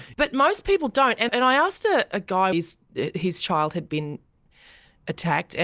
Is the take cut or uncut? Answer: cut